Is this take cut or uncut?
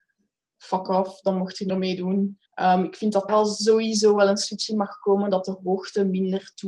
cut